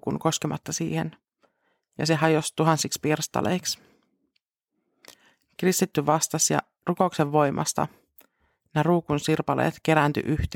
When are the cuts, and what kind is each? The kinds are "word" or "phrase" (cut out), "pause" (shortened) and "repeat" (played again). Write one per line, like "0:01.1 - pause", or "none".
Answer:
none